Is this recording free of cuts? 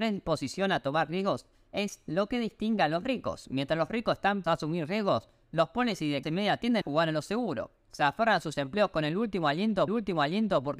no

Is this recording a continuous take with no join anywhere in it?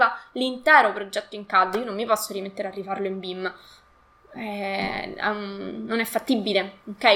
yes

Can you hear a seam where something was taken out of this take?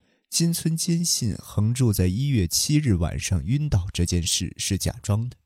no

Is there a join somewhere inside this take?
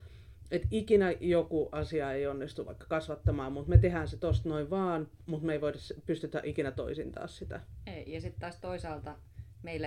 no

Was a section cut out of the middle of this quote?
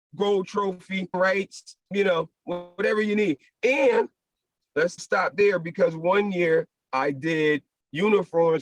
yes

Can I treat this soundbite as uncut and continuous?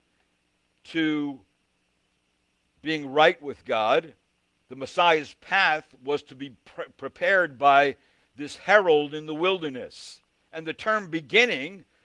yes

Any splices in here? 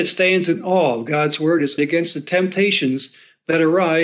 yes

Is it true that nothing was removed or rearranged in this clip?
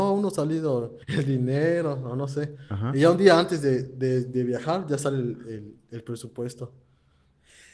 no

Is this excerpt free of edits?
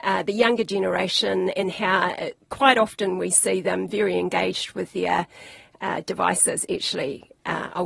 yes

